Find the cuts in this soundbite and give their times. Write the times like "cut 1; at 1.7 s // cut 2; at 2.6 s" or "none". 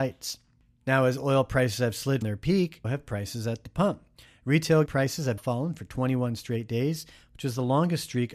cut 1; at 2.2 s // cut 2; at 2.8 s // cut 3; at 4.9 s // cut 4; at 5.4 s